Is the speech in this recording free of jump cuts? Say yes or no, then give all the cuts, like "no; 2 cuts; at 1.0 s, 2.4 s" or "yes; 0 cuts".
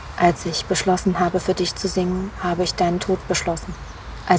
yes; 0 cuts